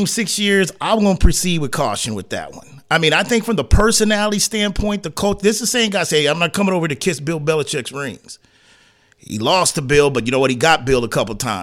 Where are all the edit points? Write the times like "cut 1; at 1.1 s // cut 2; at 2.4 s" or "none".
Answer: none